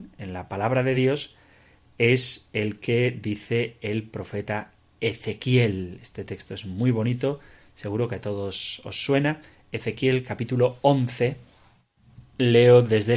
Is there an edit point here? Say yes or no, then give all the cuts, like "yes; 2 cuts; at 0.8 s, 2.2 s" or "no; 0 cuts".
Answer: no; 0 cuts